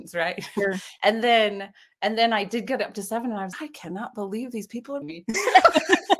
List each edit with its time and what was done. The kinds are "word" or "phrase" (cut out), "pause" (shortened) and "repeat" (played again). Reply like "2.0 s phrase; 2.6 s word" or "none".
3.5 s word; 5.0 s word